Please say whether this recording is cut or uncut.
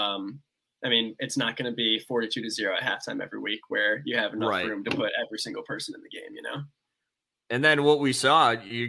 uncut